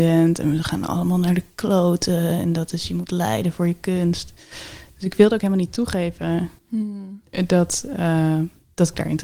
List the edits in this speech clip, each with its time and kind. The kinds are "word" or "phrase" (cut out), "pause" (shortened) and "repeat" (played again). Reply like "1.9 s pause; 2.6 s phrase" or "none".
6.6 s pause